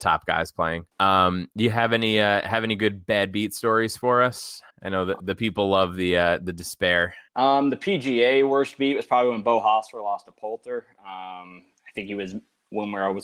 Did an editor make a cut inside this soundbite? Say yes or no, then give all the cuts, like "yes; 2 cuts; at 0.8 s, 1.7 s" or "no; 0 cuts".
yes; 3 cuts; at 0.9 s, 4.7 s, 7.3 s